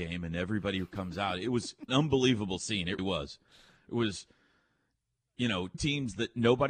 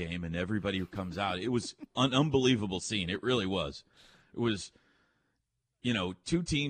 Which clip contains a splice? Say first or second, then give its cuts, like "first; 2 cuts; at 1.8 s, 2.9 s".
first; 3 cuts; at 1.9 s, 3.0 s, 5.7 s